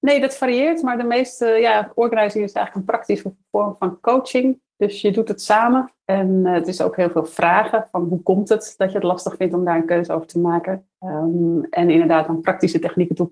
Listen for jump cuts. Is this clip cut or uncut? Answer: cut